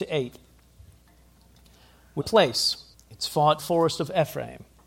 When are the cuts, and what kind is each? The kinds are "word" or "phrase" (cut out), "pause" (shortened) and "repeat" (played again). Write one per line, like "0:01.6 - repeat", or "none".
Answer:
0:02.2 - phrase
0:02.9 - pause
0:03.6 - phrase